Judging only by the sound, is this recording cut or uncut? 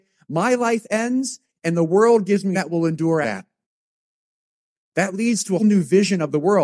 cut